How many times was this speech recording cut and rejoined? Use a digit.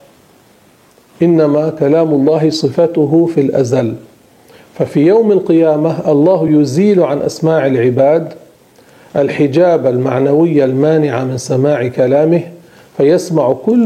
0